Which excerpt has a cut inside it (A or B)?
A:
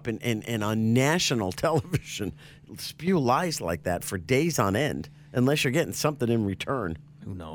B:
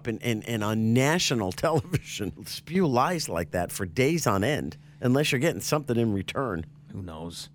B